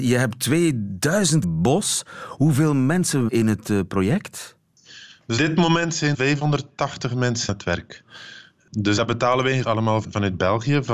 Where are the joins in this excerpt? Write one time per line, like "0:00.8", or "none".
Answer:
0:01.4
0:03.3
0:05.4
0:06.1
0:07.5
0:09.0
0:09.6
0:10.0